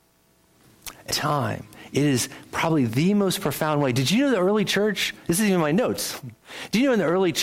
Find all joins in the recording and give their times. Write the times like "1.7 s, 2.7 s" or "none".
1.1 s